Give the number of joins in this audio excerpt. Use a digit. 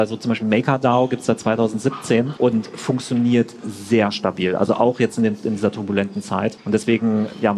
0